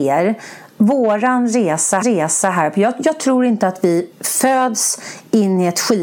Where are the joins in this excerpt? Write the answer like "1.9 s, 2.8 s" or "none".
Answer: 2.0 s, 4.1 s